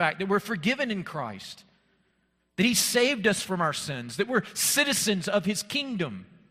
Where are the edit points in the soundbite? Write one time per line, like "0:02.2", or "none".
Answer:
none